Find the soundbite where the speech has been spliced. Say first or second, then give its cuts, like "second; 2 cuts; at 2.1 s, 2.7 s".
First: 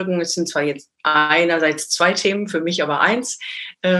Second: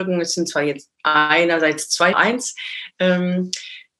second; 1 cut; at 2.1 s